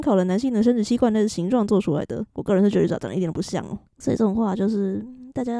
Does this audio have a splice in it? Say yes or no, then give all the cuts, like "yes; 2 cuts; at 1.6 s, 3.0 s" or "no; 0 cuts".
yes; 2 cuts; at 2.3 s, 3.9 s